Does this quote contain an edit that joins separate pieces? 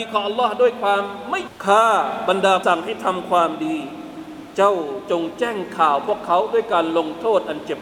yes; 2 cuts; at 1.5 s, 2.6 s

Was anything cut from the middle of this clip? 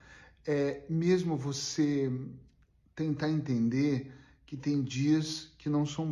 no; 0 cuts

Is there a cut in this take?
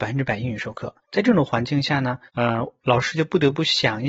yes; 2 cuts; at 1.0 s, 2.3 s

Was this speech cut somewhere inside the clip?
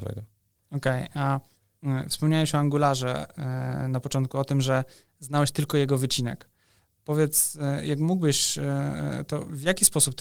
no; 0 cuts

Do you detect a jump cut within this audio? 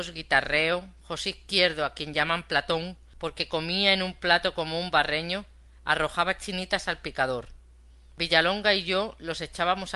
no; 0 cuts

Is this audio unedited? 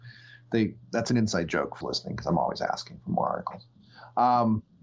no; 1 cut; at 1.8 s

